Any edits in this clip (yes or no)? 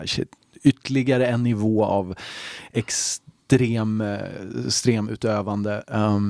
no